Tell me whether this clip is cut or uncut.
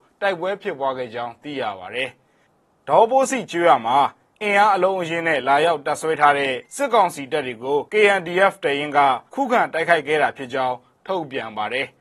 cut